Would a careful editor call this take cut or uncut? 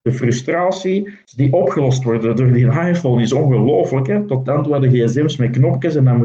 uncut